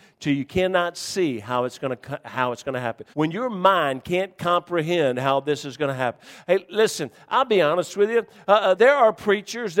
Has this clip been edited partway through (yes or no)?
yes